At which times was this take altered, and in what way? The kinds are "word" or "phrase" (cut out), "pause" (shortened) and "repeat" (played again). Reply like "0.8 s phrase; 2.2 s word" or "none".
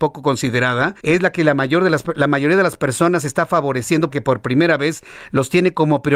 1.0 s pause; 4.1 s phrase